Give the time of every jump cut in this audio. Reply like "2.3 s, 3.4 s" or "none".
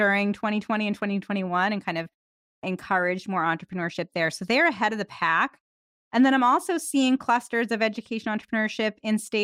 none